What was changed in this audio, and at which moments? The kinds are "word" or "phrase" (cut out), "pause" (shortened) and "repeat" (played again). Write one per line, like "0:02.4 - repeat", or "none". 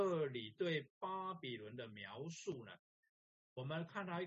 none